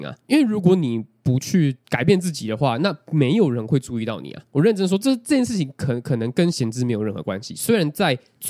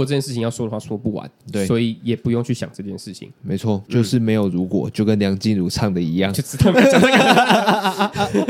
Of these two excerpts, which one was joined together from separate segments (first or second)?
second